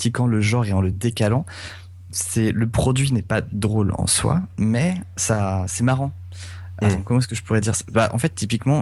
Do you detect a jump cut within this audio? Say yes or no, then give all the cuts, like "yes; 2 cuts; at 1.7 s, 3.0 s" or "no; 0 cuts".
no; 0 cuts